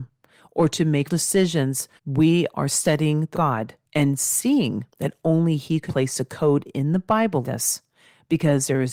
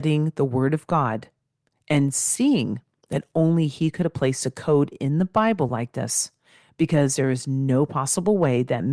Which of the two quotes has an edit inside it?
first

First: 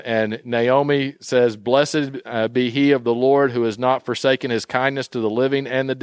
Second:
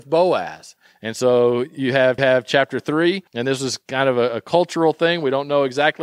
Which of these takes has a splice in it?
second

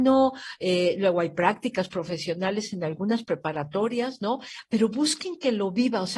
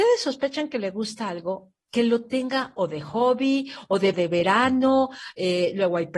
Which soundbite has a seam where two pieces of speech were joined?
second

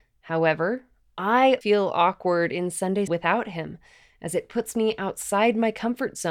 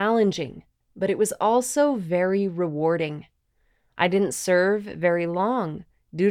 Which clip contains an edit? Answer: first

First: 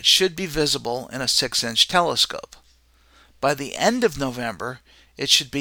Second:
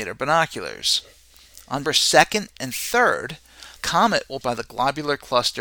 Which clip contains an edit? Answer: second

